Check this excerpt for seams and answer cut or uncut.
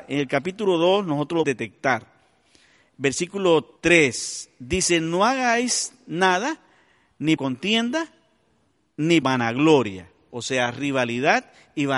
cut